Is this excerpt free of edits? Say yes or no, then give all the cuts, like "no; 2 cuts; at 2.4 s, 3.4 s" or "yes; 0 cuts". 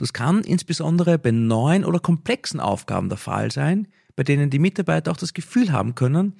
yes; 0 cuts